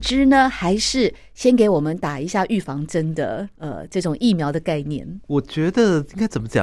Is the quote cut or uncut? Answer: cut